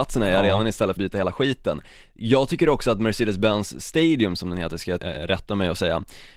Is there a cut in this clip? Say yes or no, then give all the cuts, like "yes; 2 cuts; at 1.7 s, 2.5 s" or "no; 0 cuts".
yes; 2 cuts; at 1.0 s, 5.0 s